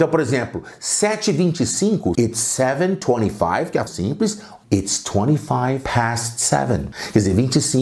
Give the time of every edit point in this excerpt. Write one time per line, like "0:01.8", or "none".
0:02.1
0:03.9
0:04.6